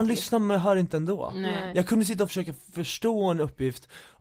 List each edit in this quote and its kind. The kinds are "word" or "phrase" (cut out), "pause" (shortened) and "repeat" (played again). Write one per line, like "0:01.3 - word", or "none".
0:02.3 - phrase